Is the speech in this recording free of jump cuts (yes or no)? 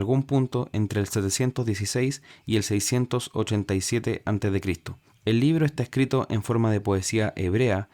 yes